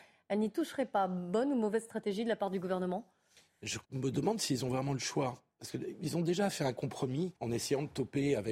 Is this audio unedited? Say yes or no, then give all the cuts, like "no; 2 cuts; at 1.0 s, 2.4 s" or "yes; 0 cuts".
no; 2 cuts; at 3.8 s, 7.4 s